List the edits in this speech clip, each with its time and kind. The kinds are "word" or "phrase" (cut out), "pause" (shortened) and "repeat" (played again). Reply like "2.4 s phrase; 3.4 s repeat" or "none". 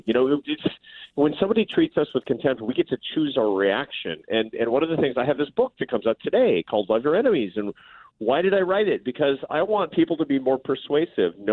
none